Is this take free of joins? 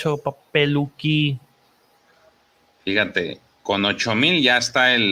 yes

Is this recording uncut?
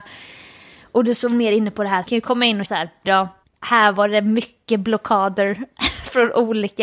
no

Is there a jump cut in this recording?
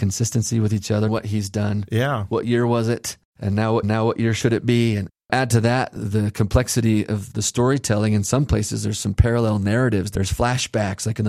yes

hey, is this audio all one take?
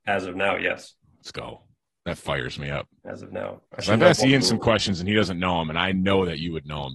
no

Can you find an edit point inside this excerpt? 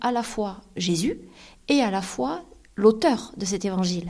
no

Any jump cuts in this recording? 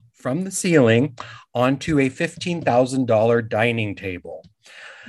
no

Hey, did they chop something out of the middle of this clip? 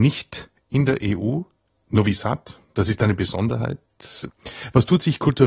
no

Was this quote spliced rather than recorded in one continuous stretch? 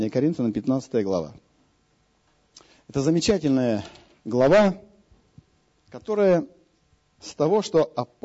yes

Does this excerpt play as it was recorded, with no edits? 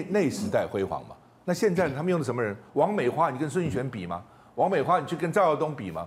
yes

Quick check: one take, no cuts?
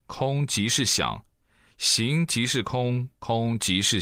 yes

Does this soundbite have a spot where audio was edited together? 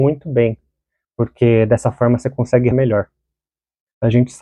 yes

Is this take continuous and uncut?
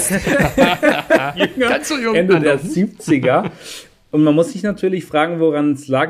yes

